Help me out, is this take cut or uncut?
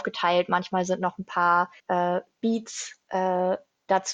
cut